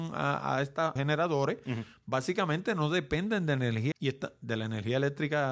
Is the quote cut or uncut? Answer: cut